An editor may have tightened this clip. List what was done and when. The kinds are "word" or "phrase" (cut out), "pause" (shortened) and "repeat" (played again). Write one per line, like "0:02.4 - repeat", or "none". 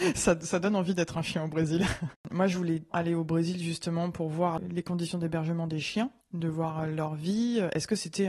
0:02.2 - pause
0:02.9 - word
0:06.2 - pause